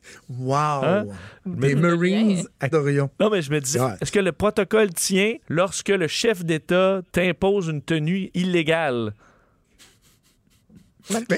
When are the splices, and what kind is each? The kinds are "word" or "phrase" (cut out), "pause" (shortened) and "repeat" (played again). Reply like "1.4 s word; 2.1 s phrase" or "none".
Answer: 2.7 s word; 3.7 s phrase; 5.4 s pause; 7.1 s pause